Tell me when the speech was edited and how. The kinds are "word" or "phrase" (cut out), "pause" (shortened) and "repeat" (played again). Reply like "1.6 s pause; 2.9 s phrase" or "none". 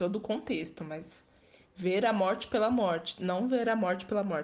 none